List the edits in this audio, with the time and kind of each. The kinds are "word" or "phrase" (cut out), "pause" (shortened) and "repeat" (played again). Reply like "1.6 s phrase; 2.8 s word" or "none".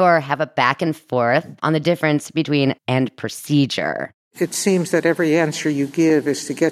1.6 s pause; 2.8 s word